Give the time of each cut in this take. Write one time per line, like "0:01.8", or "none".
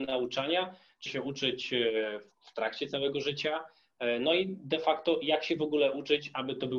0:01.1